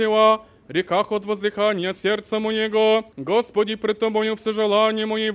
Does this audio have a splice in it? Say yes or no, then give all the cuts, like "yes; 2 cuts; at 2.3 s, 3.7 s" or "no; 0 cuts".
yes; 1 cut; at 3.1 s